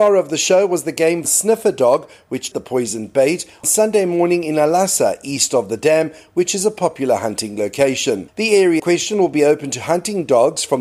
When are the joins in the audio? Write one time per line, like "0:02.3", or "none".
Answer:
0:01.2
0:02.5
0:03.6
0:08.8